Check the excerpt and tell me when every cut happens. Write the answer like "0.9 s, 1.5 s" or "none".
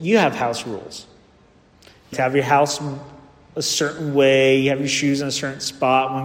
2.1 s